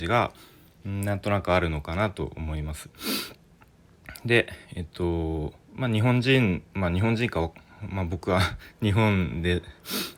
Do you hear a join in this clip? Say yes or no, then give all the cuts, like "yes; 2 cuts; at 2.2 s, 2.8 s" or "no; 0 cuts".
yes; 3 cuts; at 4.6 s, 5.6 s, 6.7 s